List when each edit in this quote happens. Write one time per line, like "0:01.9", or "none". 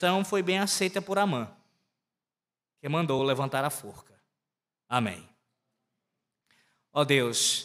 none